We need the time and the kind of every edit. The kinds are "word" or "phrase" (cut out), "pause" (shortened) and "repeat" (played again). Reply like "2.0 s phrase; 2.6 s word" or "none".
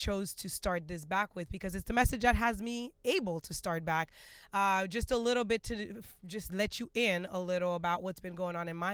6.5 s word